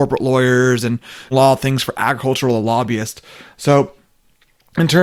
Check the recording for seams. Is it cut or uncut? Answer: cut